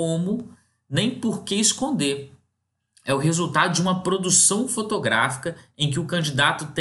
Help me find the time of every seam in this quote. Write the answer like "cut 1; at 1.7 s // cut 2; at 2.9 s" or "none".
none